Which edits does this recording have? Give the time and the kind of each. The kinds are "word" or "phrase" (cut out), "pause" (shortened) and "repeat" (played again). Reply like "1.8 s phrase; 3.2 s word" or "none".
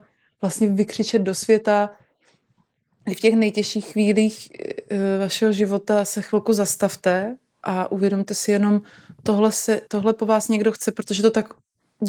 9.9 s pause